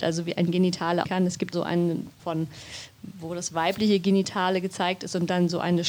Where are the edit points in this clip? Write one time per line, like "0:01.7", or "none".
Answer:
0:01.0
0:01.5
0:02.2